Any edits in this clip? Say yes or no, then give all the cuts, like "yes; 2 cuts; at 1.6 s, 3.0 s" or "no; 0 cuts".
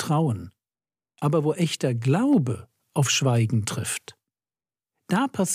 no; 0 cuts